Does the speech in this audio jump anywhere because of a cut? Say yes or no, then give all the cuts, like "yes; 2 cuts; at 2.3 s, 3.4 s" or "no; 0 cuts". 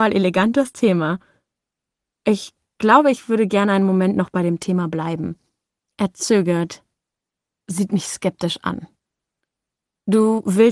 no; 0 cuts